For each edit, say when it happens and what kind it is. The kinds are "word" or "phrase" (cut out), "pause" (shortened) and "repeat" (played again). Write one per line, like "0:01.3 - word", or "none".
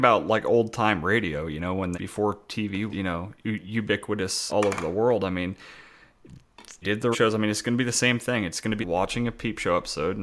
0:01.9 - word
0:02.9 - word
0:04.5 - word
0:06.8 - word
0:07.1 - word
0:08.8 - word